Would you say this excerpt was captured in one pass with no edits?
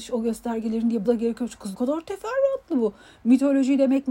no; 2 cuts; at 1.0 s, 1.7 s

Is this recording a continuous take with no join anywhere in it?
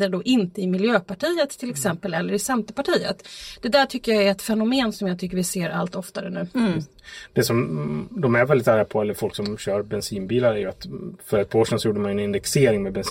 yes; 0 cuts

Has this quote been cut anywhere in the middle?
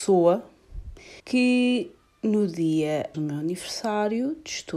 yes; 2 cuts; at 1.2 s, 3.1 s

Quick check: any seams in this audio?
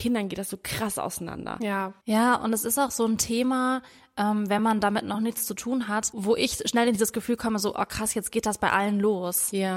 no; 0 cuts

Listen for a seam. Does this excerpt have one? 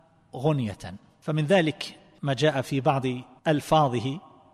no; 0 cuts

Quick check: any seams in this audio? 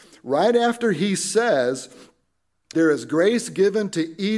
yes; 1 cut; at 2.7 s

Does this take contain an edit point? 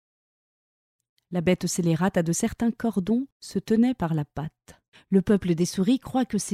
yes; 2 cuts; at 3.3 s, 4.9 s

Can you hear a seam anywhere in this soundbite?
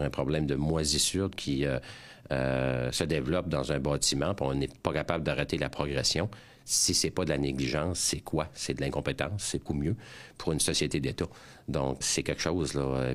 yes; 3 cuts; at 1.3 s, 9.7 s, 12.0 s

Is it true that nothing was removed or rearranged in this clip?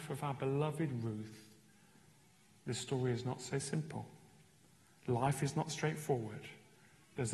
yes; 0 cuts

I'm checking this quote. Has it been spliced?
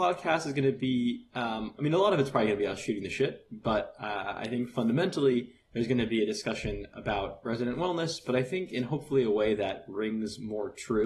no; 0 cuts

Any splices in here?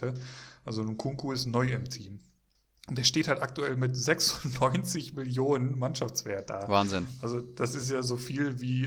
no; 0 cuts

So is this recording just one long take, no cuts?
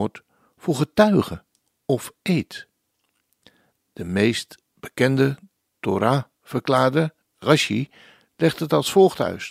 yes; 0 cuts

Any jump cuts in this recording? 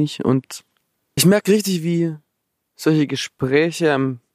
yes; 1 cut; at 1.2 s

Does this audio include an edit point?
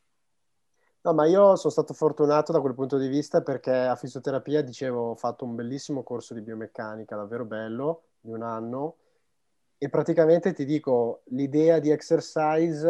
no; 0 cuts

